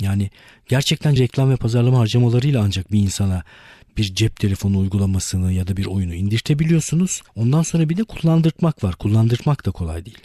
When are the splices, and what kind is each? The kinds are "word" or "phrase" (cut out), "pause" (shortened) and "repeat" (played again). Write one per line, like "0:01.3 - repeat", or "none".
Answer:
0:01.2 - word
0:07.3 - pause